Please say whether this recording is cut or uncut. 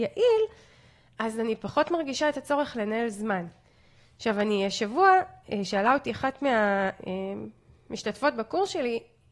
uncut